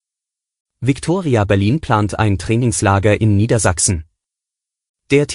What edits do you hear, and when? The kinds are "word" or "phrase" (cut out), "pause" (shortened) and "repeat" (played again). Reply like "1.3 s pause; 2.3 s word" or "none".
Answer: none